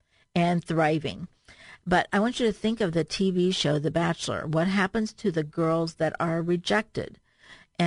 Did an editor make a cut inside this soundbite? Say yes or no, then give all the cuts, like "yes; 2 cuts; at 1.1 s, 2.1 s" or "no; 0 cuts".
no; 0 cuts